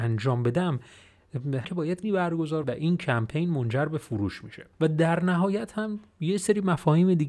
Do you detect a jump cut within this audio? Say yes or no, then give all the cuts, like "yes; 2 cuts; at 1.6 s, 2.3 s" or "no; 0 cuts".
yes; 4 cuts; at 1.6 s, 2.0 s, 2.6 s, 4.7 s